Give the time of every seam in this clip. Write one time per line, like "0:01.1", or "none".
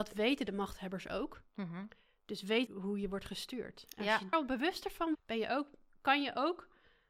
0:02.7
0:04.3
0:05.1